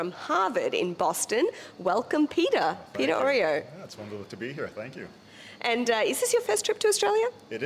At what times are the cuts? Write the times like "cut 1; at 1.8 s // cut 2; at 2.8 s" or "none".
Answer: none